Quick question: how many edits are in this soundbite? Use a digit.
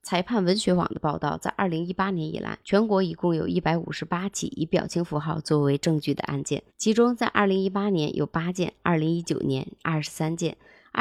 2